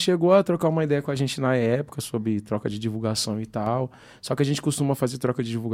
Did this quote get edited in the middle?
no; 0 cuts

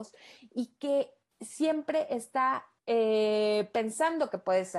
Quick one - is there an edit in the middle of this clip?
no; 0 cuts

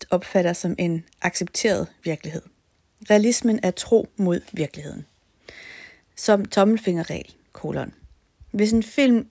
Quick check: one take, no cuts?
yes; 0 cuts

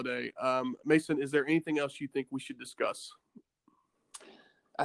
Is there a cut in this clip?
no; 0 cuts

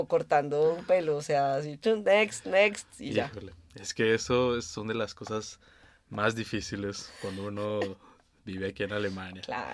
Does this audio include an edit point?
no; 0 cuts

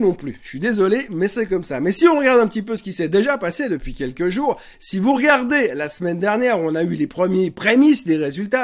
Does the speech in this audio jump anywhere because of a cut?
no; 0 cuts

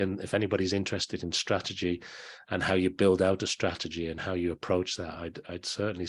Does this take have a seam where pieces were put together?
no; 0 cuts

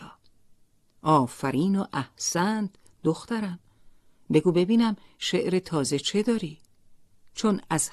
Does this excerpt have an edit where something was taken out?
no; 0 cuts

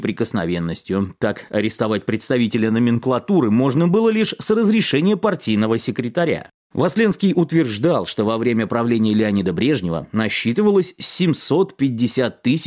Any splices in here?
no; 0 cuts

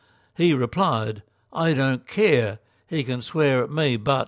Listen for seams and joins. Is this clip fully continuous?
yes; 0 cuts

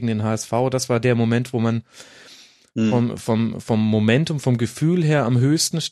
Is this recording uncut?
yes; 0 cuts

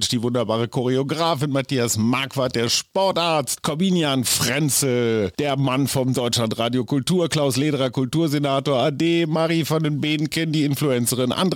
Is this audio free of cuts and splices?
yes; 0 cuts

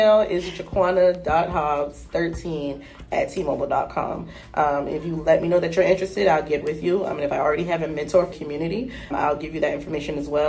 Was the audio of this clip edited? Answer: yes; 3 cuts; at 6.6 s, 8.3 s, 9.1 s

